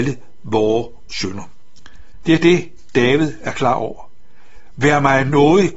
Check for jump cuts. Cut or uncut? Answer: uncut